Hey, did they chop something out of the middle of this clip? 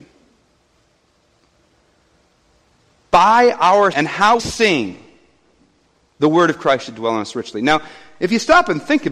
yes; 2 cuts; at 3.9 s, 4.4 s

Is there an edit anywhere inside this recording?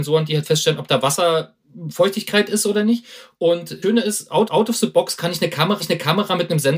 yes; 3 cuts; at 3.8 s, 4.5 s, 5.8 s

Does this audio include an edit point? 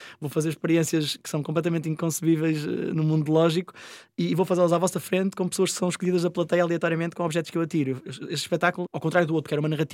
yes; 1 cut; at 8.9 s

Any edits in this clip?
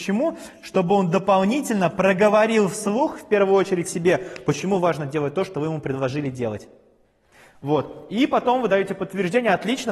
no; 0 cuts

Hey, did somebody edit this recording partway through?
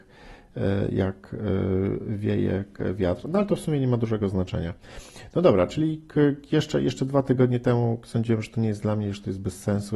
no; 0 cuts

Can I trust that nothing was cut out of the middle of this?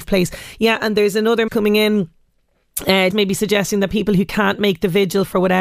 no; 2 cuts; at 1.5 s, 3.1 s

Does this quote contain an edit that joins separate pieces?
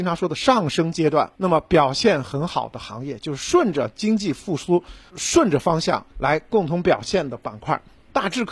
yes; 3 cuts; at 1.3 s, 5.1 s, 6.1 s

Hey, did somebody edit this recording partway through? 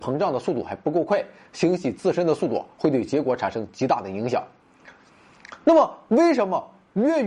no; 0 cuts

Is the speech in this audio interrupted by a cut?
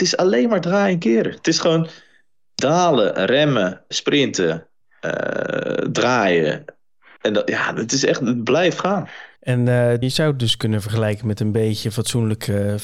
yes; 3 cuts; at 3.9 s, 9.4 s, 10.0 s

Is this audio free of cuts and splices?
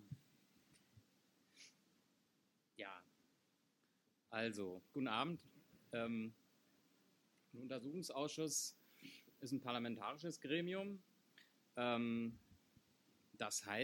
yes; 0 cuts

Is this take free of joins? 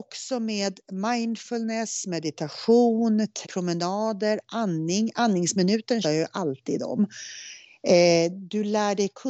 no; 2 cuts; at 3.4 s, 6.0 s

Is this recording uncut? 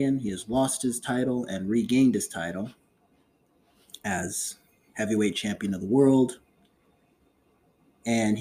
yes; 0 cuts

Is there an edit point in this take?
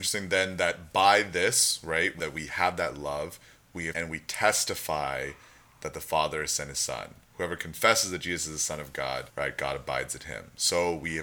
yes; 3 cuts; at 2.2 s, 3.9 s, 9.3 s

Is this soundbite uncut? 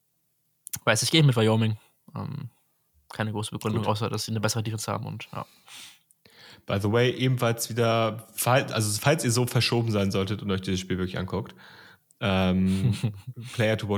yes; 0 cuts

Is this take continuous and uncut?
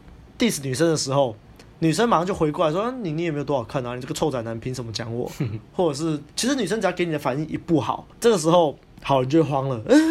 no; 2 cuts; at 6.3 s, 8.1 s

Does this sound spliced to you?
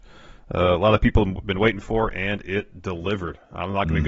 no; 0 cuts

